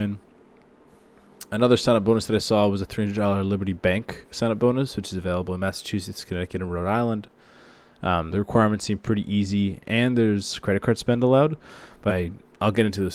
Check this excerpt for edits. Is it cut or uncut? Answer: cut